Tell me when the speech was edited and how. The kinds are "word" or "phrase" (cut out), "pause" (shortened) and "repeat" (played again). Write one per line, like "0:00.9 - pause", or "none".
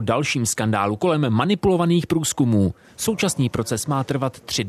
none